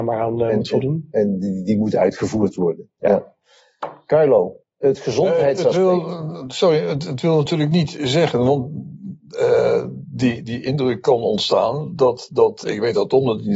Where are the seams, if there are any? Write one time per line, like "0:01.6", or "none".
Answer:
0:04.6
0:09.2
0:12.6